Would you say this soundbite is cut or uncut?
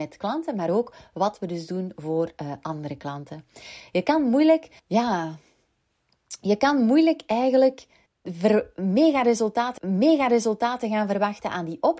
cut